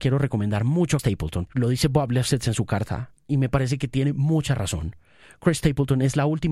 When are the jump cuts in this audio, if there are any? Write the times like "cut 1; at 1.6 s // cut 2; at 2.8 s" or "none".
cut 1; at 1.0 s // cut 2; at 1.5 s